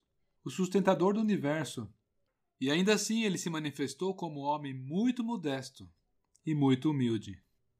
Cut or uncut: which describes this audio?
uncut